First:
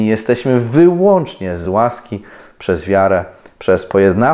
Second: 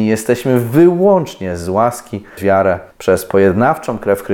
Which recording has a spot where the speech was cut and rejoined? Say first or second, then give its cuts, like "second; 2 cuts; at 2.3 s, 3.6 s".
second; 2 cuts; at 2.4 s, 2.9 s